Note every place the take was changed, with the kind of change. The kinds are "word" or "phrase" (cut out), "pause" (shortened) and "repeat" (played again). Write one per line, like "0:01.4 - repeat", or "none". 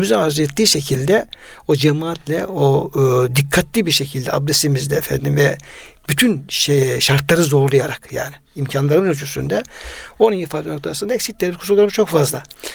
none

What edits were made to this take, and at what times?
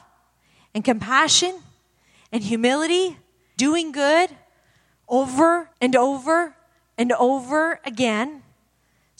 0:03.6 - word
0:05.7 - pause

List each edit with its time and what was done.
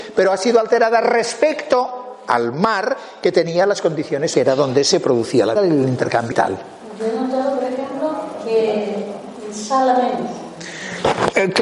0:04.3 - word
0:05.6 - word
0:06.3 - word

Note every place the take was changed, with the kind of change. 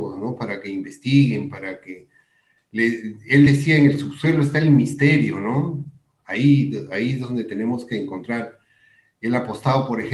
none

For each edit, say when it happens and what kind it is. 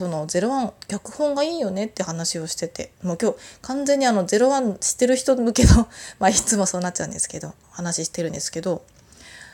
0:07.6 - pause

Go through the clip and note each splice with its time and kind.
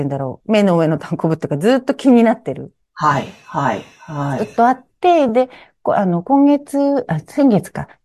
none

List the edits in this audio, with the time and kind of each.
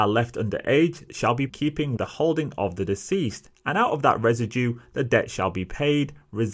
0:01.1 - word
0:01.5 - phrase
0:02.0 - word

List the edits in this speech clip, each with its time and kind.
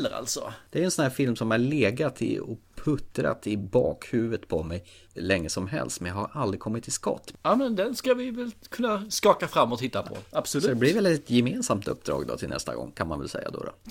none

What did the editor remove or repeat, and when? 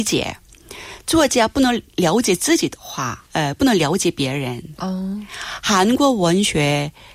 0:03.3 - pause

